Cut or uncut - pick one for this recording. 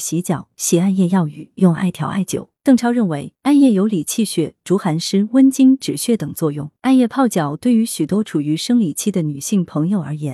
cut